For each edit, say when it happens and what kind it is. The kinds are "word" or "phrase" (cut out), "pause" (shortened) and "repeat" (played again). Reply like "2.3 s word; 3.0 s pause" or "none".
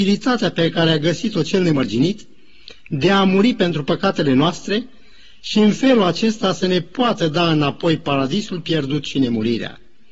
none